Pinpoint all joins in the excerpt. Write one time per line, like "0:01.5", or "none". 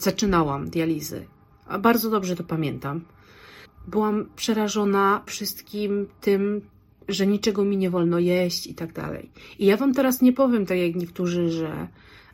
0:03.7
0:05.3